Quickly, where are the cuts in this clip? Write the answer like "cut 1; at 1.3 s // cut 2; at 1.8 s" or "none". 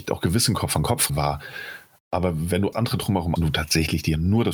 cut 1; at 1.1 s // cut 2; at 2.7 s // cut 3; at 3.4 s